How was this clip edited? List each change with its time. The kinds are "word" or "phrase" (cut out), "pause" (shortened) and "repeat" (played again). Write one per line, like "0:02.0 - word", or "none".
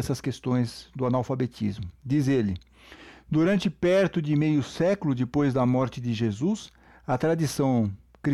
none